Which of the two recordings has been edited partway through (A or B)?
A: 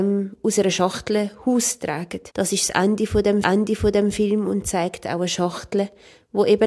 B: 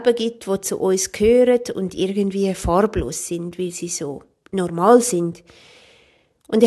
A